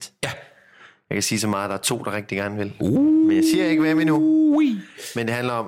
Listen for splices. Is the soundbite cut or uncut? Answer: uncut